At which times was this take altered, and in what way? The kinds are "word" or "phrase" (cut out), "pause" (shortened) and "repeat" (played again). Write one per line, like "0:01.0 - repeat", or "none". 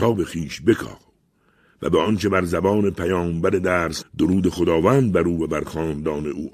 0:04.0 - word